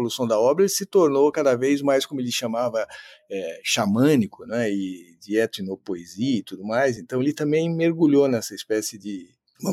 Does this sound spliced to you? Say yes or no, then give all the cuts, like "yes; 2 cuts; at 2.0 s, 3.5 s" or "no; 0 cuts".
no; 0 cuts